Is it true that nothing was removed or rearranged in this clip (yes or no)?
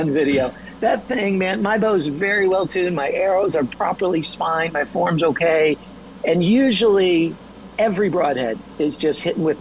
yes